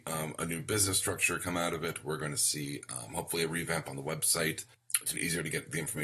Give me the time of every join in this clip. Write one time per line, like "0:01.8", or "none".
0:05.1